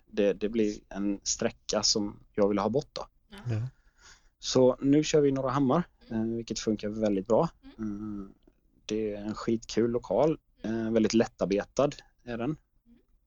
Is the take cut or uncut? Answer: uncut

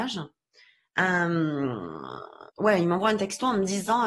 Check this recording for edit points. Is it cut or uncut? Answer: cut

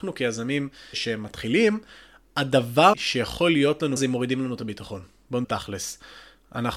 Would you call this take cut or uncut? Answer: cut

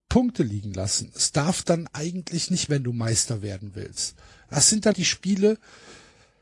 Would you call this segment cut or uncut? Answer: cut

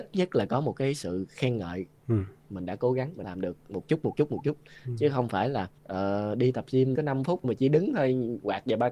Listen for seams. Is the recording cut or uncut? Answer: cut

